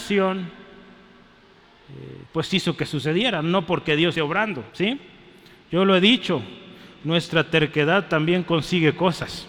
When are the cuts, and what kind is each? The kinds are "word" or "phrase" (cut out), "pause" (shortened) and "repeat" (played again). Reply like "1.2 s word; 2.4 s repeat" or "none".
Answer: 2.3 s pause; 4.1 s word; 4.7 s pause